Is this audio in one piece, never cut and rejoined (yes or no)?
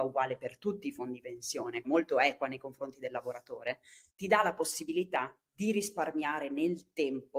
no